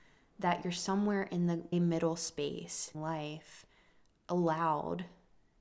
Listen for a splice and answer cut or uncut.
cut